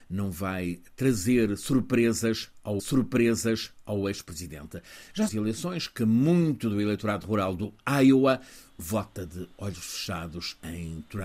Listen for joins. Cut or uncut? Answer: cut